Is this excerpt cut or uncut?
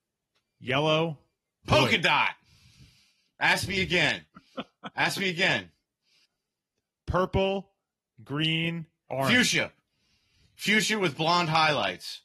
cut